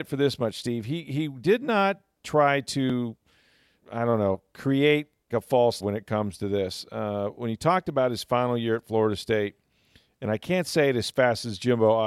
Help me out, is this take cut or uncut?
cut